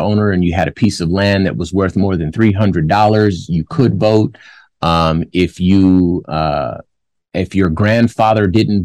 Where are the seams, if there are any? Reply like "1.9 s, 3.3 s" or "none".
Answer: none